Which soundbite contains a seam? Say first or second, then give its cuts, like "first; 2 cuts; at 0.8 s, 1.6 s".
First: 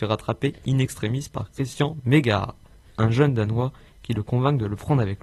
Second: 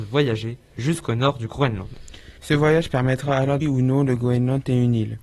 second; 2 cuts; at 2.4 s, 3.6 s